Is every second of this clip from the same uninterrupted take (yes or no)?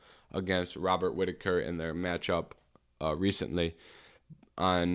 yes